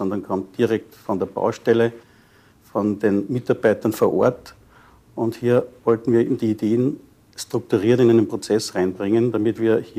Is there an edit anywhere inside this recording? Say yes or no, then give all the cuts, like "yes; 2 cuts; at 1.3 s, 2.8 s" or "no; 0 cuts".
no; 0 cuts